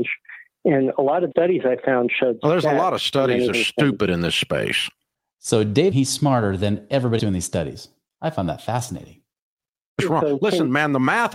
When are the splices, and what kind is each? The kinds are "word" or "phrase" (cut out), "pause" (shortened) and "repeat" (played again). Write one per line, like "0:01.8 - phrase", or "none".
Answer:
0:01.3 - word
0:03.5 - word
0:05.9 - word
0:07.2 - word